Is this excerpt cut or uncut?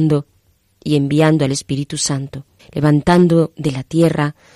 cut